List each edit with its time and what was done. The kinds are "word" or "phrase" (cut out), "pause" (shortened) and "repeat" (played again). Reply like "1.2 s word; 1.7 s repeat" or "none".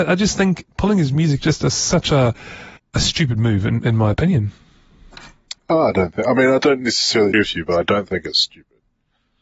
1.4 s word; 2.8 s pause; 7.3 s word